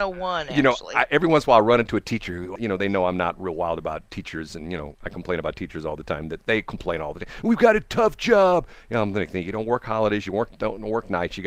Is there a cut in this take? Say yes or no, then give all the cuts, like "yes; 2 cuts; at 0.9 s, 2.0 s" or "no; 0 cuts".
yes; 1 cut; at 2.5 s